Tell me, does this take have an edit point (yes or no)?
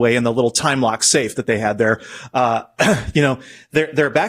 no